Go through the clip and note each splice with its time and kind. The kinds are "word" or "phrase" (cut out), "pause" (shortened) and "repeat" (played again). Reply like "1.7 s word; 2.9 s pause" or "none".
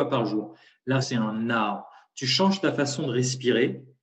1.0 s word